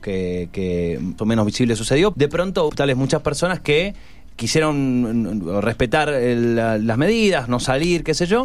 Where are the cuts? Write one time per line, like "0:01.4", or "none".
0:01.2
0:02.1
0:02.7